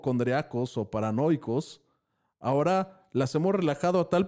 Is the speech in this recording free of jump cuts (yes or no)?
yes